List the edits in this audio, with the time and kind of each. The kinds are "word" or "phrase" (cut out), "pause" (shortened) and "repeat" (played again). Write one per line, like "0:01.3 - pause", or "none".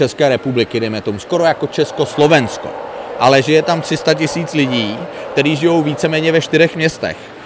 none